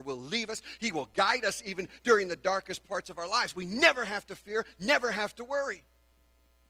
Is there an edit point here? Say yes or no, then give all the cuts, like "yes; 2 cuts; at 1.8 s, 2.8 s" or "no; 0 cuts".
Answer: no; 0 cuts